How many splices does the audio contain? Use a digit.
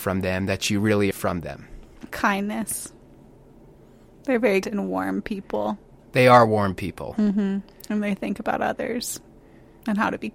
2